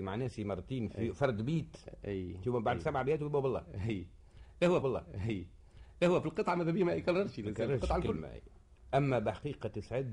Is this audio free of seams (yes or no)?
no